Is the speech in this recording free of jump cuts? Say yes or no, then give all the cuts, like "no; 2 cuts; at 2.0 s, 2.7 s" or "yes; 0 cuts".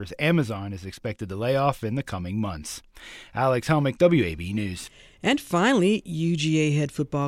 yes; 0 cuts